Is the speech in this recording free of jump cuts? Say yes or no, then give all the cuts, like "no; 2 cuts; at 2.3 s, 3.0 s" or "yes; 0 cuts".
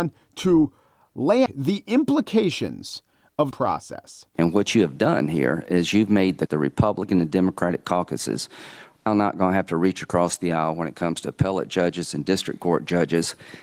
no; 4 cuts; at 1.5 s, 3.5 s, 6.5 s, 9.1 s